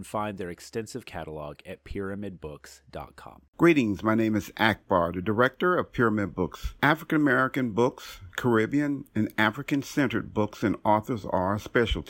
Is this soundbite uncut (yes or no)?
yes